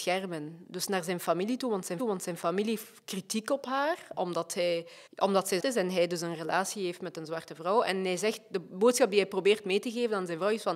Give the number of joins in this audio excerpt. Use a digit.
3